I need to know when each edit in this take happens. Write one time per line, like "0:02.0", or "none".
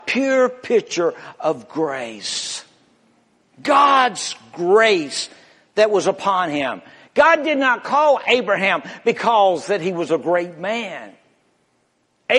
none